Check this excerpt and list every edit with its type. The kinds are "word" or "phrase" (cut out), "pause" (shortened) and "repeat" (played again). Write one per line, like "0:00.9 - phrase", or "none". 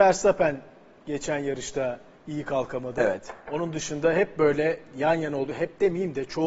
none

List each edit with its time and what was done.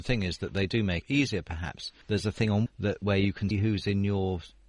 0:01.0 - word
0:02.0 - pause
0:02.7 - phrase
0:03.5 - word

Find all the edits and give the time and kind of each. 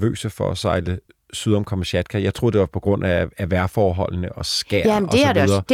none

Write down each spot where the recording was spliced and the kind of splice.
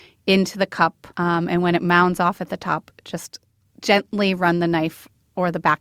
0:01.1 - pause

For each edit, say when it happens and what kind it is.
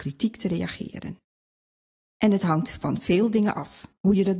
none

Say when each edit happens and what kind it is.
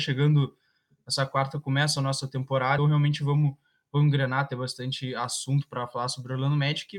0:02.8 - word

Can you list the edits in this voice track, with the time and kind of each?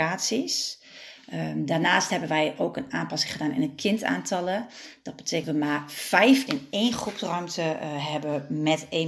0:05.4 - word
0:06.5 - word

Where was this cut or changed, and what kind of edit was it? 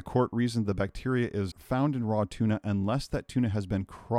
0:01.5 - word

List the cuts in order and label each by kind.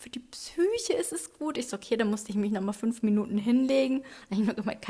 none

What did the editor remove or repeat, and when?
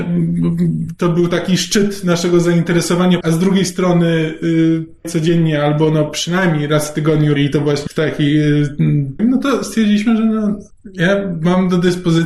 0:03.2 - word
0:05.0 - word
0:07.4 - word
0:07.9 - word
0:09.2 - word

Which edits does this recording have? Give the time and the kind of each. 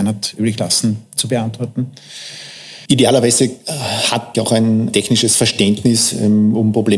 0:04.3 - phrase

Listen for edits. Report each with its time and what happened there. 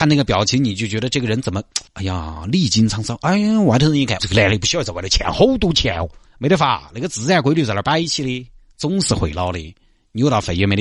0:01.9 - pause
0:04.2 - word
0:06.3 - pause

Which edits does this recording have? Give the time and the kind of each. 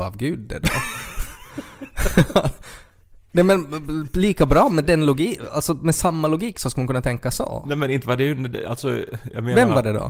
none

